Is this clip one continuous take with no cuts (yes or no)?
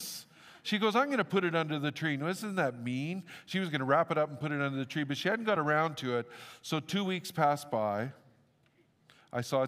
yes